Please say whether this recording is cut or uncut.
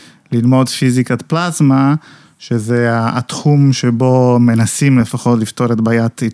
uncut